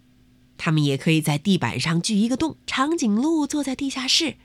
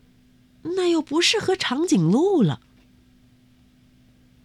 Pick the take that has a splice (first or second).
first